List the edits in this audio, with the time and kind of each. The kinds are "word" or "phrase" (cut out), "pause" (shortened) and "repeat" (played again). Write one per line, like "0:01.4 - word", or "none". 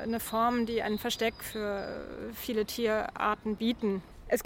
none

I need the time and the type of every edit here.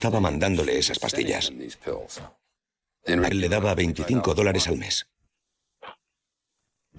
0:03.3 - word

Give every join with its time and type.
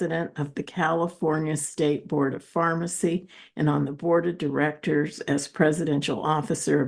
none

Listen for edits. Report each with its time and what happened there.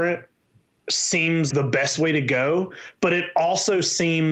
0:01.5 - word

